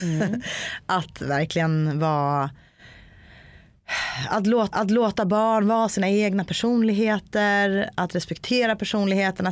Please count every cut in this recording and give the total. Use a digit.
1